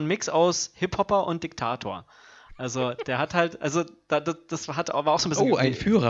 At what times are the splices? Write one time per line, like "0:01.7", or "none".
none